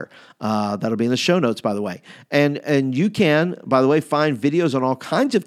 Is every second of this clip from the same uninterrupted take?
yes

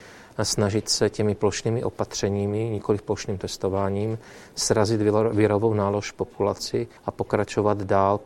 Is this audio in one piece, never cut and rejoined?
no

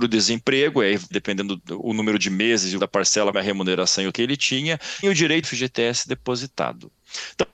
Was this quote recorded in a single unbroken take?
no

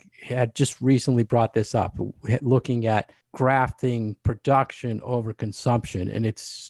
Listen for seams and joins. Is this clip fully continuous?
yes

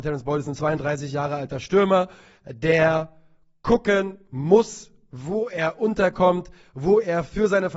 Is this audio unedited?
yes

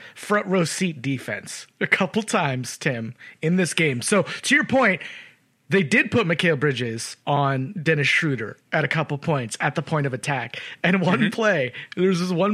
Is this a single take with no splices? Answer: yes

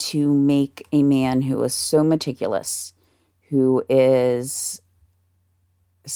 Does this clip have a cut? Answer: no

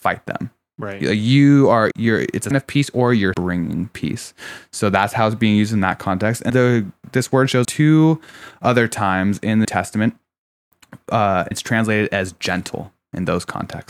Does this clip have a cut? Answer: yes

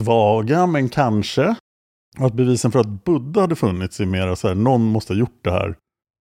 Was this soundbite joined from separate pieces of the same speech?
no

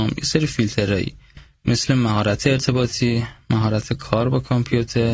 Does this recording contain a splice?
no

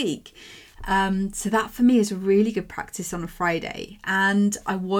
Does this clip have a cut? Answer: no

